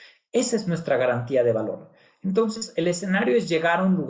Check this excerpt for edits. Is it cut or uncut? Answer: uncut